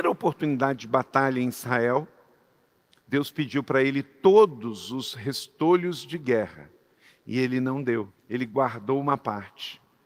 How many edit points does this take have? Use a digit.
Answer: 1